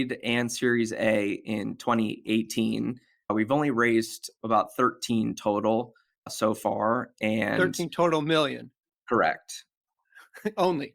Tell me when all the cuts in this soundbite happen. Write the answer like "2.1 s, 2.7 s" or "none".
none